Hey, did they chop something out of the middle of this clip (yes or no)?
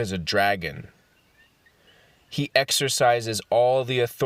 no